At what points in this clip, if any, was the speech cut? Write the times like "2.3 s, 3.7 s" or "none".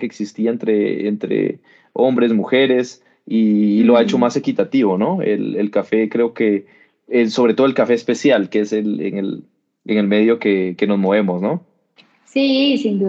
none